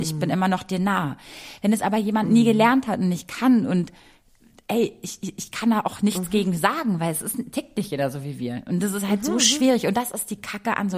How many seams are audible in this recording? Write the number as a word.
zero